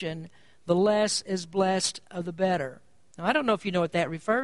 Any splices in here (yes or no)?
no